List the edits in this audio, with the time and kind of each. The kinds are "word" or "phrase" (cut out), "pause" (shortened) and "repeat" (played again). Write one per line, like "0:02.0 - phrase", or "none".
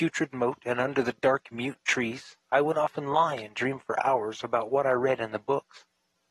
none